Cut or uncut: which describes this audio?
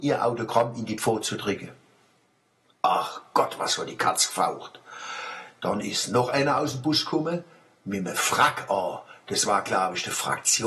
uncut